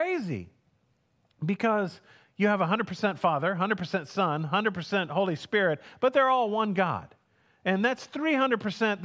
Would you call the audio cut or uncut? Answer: uncut